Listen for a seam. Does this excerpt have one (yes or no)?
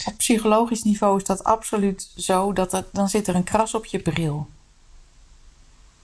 no